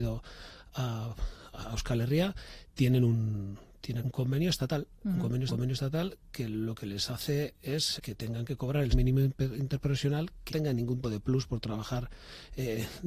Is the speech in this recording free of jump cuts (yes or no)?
no